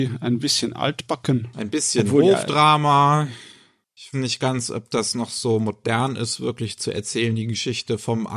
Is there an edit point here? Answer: yes; 1 cut; at 4.1 s

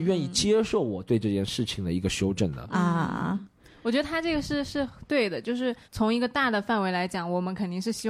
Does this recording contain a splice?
yes; 1 cut; at 5.8 s

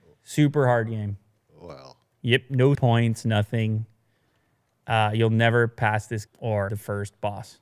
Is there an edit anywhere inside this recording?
yes; 3 cuts; at 2.7 s, 6.3 s, 6.7 s

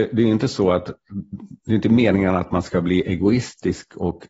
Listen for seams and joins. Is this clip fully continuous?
yes; 0 cuts

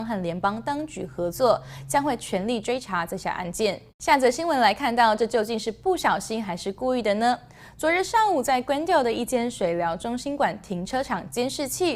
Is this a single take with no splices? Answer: no; 1 cut; at 3.9 s

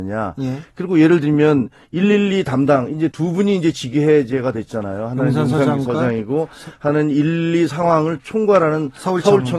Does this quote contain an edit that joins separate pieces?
yes; 1 cut; at 3.1 s

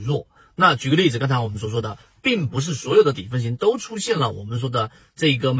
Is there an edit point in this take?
no; 0 cuts

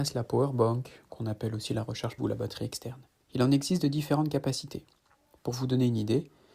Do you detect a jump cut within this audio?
yes; 2 cuts; at 2.2 s, 3.2 s

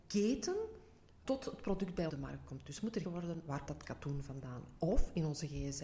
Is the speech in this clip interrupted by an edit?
yes; 4 cuts; at 1.2 s, 2.1 s, 3.0 s, 3.7 s

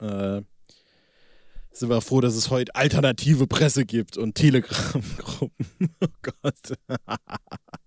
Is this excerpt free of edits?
yes; 0 cuts

